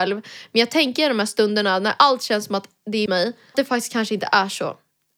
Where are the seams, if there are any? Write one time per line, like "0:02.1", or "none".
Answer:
0:03.1
0:03.5